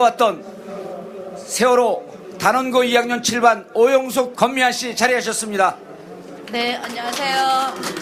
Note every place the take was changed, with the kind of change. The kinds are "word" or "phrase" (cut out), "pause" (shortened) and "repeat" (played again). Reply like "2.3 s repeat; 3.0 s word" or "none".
4.3 s phrase